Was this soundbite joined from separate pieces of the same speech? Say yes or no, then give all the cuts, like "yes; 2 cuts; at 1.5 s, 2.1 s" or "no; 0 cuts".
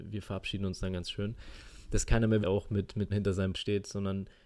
yes; 3 cuts; at 2.4 s, 3.1 s, 3.5 s